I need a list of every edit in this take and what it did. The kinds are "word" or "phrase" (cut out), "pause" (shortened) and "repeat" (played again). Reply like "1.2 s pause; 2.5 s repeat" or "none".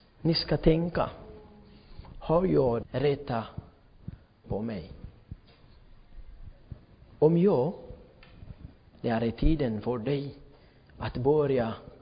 2.8 s word; 4.4 s word